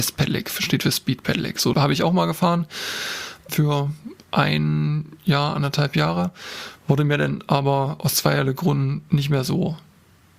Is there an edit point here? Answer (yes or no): yes